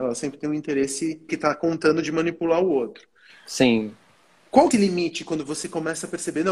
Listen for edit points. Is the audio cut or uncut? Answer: cut